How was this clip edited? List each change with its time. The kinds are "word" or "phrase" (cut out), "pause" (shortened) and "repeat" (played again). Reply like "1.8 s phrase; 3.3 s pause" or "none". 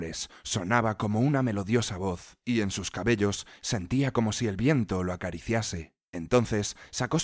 6.0 s pause